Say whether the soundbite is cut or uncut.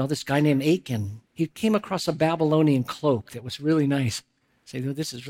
cut